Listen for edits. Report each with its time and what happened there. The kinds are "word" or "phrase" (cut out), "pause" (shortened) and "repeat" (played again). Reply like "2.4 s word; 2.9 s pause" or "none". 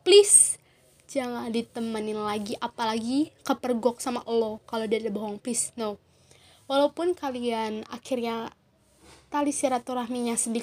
none